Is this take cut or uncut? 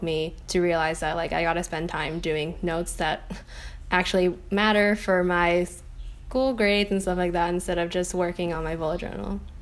uncut